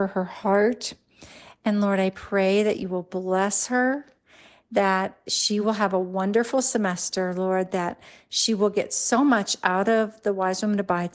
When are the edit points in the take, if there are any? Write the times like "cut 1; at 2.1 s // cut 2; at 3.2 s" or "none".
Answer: none